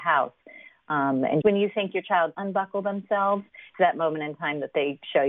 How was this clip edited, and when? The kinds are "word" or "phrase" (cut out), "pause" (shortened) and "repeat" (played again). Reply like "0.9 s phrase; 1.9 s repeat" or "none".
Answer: 1.4 s word; 2.3 s word; 3.7 s word